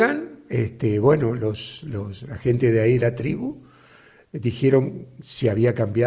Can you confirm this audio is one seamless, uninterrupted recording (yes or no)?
yes